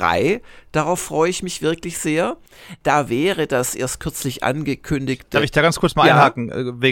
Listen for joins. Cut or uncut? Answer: uncut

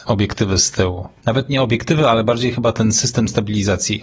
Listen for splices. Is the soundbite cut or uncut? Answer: uncut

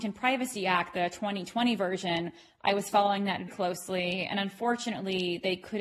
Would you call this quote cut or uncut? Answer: cut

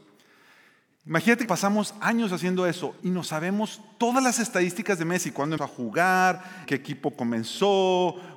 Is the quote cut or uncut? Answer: cut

